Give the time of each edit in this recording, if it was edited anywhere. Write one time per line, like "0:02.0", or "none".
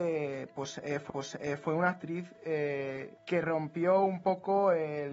0:01.1
0:03.2